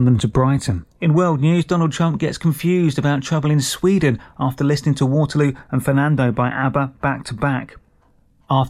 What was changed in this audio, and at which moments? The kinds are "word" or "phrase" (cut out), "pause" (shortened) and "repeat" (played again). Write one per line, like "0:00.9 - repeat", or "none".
0:00.9 - pause